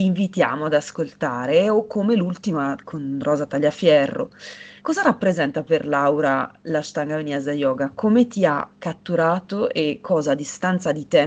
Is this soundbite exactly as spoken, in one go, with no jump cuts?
no; 1 cut; at 4.8 s

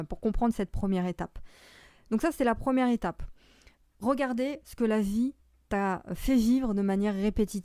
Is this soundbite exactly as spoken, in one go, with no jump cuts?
yes; 0 cuts

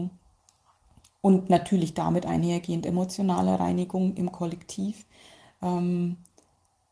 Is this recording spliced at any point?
no; 0 cuts

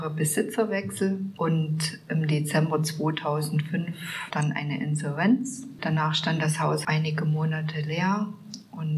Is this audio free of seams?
yes; 0 cuts

